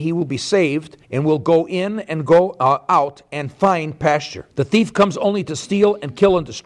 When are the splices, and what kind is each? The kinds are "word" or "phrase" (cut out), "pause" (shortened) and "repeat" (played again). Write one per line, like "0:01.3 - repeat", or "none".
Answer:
0:01.0 - pause
0:04.5 - pause